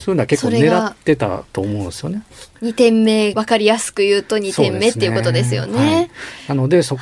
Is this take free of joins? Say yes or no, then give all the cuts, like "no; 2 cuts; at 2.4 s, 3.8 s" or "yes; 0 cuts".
no; 2 cuts; at 1.5 s, 3.3 s